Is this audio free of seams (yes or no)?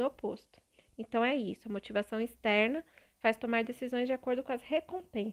yes